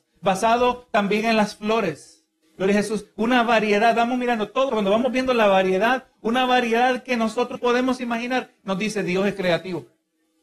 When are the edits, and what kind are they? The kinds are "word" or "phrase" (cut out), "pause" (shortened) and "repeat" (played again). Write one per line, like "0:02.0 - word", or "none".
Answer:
0:02.4 - pause
0:04.7 - word
0:07.5 - word